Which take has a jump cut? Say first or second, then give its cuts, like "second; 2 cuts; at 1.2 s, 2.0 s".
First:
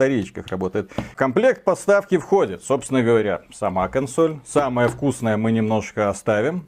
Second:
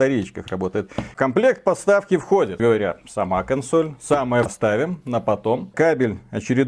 second; 2 cuts; at 2.6 s, 4.5 s